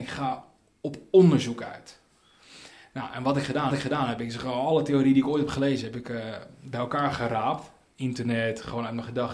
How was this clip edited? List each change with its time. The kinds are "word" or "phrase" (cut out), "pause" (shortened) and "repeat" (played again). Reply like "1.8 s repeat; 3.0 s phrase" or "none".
3.7 s repeat